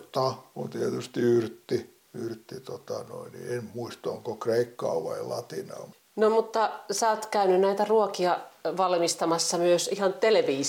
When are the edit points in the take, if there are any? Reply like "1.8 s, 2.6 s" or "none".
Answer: 2.0 s